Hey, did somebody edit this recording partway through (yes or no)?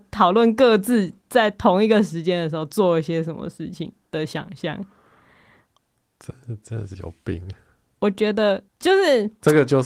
yes